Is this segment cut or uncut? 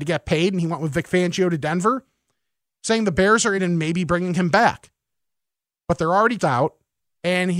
cut